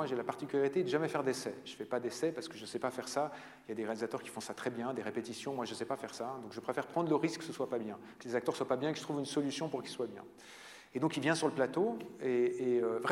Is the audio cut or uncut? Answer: uncut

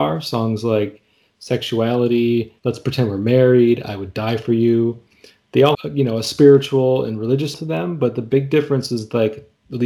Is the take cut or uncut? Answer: cut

